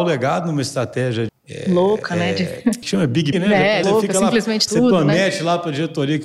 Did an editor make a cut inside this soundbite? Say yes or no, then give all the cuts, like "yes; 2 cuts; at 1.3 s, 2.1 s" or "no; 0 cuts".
yes; 5 cuts; at 1.3 s, 2.8 s, 3.3 s, 3.8 s, 4.7 s